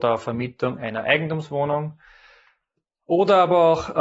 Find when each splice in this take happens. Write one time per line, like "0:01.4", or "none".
none